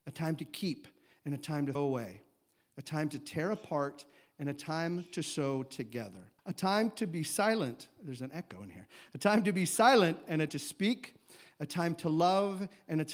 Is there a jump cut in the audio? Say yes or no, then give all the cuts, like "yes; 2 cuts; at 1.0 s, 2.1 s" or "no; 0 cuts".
yes; 3 cuts; at 1.8 s, 6.4 s, 10.5 s